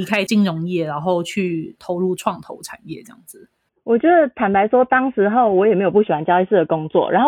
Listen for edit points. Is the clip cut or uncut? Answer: cut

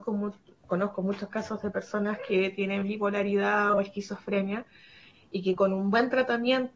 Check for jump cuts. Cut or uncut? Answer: uncut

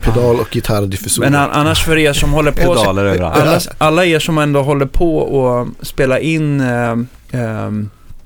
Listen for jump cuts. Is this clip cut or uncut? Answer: uncut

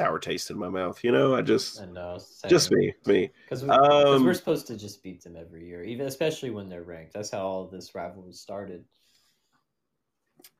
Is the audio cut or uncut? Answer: cut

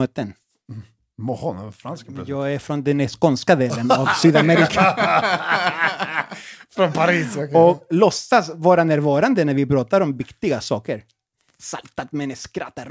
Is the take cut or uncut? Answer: uncut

